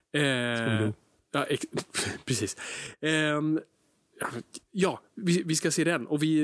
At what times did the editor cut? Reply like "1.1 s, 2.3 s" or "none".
none